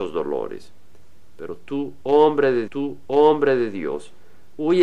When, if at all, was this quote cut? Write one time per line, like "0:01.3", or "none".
0:02.7